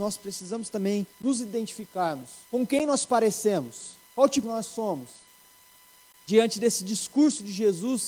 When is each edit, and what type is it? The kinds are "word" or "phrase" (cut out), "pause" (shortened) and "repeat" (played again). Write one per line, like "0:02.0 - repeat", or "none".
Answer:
0:01.1 - pause
0:02.4 - pause
0:04.1 - pause
0:04.4 - phrase